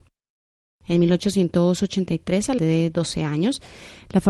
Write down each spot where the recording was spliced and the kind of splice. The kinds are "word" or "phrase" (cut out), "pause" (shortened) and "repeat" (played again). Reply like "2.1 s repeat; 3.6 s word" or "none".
2.6 s word